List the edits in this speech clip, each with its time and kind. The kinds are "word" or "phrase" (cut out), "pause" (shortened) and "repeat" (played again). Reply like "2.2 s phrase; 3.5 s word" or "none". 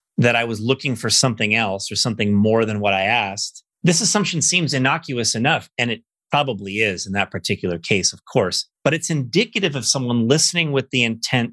3.7 s pause; 8.7 s pause